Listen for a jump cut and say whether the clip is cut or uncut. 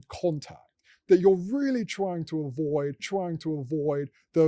cut